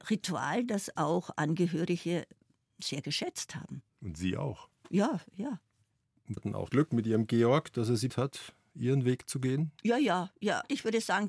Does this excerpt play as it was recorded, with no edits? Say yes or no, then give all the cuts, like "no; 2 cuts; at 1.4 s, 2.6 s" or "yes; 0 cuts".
no; 6 cuts; at 3.9 s, 4.8 s, 6.4 s, 6.7 s, 8.1 s, 9.8 s